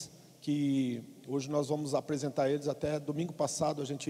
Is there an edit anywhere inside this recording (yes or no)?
no